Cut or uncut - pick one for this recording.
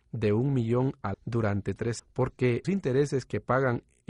cut